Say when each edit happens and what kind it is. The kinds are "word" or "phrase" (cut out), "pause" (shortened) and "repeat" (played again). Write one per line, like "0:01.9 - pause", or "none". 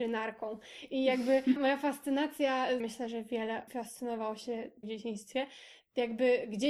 0:01.6 - word
0:02.8 - phrase
0:03.7 - word
0:04.8 - word